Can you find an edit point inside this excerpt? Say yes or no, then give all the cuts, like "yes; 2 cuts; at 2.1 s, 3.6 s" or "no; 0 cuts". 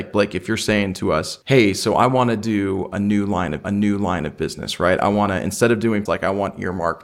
yes; 3 cuts; at 1.4 s, 3.6 s, 6.1 s